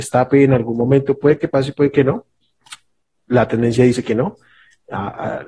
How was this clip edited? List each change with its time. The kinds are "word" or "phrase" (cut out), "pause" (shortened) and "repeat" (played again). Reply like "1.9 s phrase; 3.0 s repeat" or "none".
none